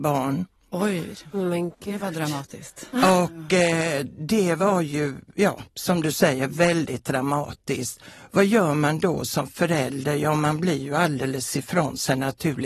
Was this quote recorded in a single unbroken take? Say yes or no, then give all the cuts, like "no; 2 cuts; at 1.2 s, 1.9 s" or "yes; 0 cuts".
yes; 0 cuts